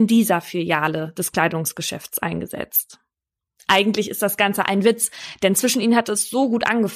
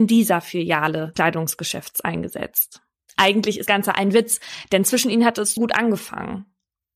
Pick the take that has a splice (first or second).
second